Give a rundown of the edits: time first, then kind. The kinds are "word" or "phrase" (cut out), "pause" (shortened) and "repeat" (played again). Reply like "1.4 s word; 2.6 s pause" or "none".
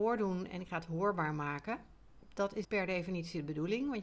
2.6 s word